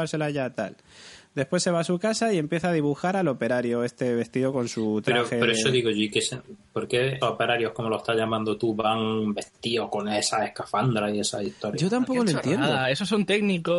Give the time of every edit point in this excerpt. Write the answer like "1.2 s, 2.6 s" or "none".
7.2 s